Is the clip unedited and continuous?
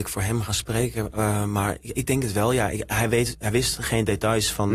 no; 1 cut; at 1.8 s

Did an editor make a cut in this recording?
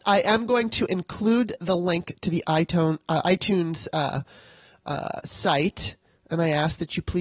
no; 0 cuts

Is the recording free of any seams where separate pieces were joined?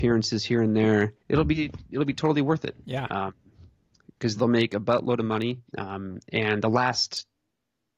no; 4 cuts; at 1.2 s, 2.8 s, 4.4 s, 5.7 s

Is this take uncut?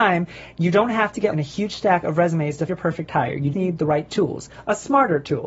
no; 3 cuts; at 1.3 s, 2.7 s, 3.5 s

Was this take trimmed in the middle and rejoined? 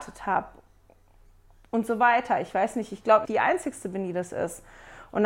yes; 1 cut; at 3.2 s

